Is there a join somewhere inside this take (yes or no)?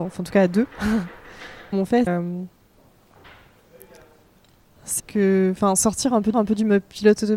yes